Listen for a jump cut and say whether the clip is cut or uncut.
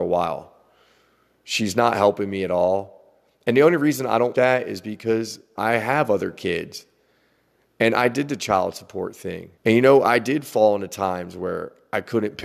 cut